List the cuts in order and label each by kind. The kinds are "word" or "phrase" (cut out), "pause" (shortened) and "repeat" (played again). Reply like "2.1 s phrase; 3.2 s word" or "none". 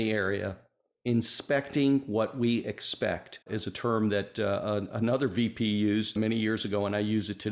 3.4 s pause